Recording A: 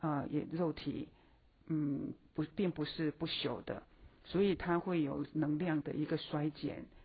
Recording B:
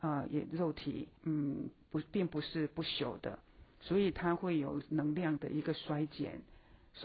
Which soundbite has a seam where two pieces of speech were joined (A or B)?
B